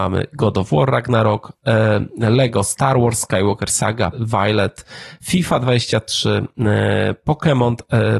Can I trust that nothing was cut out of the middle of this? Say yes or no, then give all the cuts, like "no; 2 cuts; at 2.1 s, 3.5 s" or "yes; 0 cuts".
no; 1 cut; at 4.1 s